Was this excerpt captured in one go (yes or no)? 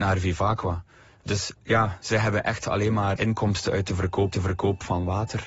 no